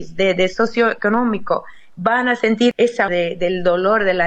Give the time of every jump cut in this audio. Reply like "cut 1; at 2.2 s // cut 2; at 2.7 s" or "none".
cut 1; at 3.1 s